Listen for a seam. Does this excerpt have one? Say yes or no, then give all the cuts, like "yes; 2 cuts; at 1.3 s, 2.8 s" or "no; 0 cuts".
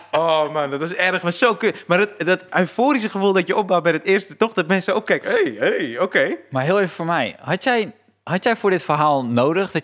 no; 0 cuts